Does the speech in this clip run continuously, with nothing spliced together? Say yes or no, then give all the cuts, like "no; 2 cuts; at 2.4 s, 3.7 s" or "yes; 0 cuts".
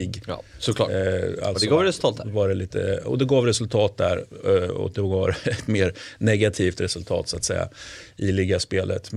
yes; 0 cuts